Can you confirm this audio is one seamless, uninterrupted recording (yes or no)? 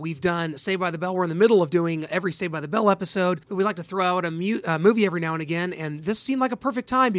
no